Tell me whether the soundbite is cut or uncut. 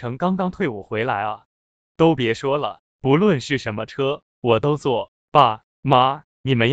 uncut